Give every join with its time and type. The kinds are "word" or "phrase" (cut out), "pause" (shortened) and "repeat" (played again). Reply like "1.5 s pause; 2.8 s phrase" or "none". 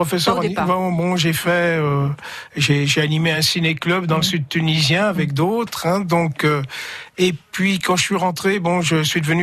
none